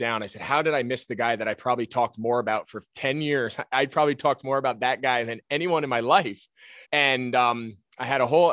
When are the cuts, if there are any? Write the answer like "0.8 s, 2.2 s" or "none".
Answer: 6.8 s